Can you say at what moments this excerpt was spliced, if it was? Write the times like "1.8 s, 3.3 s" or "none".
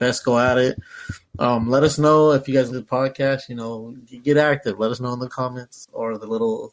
2.7 s